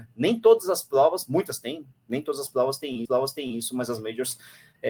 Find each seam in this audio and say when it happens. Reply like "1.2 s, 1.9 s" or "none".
2.0 s, 3.1 s